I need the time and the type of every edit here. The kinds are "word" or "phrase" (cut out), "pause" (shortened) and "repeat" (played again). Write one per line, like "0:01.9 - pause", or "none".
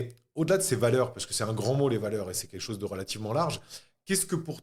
none